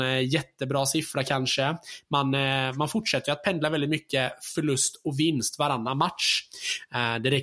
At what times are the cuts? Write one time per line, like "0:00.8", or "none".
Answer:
none